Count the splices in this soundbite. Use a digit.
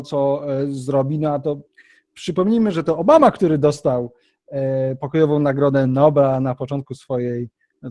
0